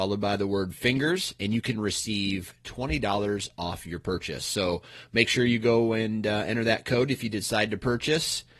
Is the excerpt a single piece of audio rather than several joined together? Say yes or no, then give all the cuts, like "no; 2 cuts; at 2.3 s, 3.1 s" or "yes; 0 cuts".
yes; 0 cuts